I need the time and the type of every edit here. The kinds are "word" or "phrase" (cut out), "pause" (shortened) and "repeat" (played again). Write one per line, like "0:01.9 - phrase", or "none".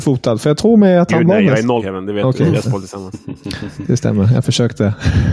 0:01.8 - word
0:02.6 - word